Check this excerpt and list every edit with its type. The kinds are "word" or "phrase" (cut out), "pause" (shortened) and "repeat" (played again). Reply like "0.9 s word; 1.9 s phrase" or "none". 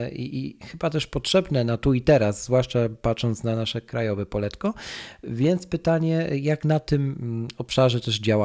none